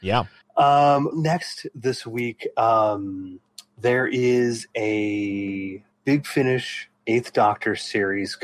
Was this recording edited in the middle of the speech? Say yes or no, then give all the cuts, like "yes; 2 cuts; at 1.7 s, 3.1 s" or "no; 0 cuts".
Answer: yes; 2 cuts; at 1.1 s, 7.0 s